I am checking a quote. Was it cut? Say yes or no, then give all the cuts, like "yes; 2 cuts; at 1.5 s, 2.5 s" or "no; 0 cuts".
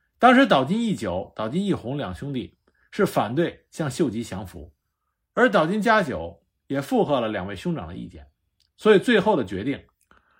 no; 0 cuts